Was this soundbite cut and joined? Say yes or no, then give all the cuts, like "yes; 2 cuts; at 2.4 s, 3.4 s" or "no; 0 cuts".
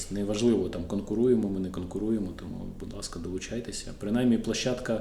no; 0 cuts